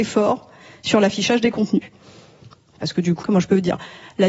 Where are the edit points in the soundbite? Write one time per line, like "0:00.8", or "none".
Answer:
0:03.2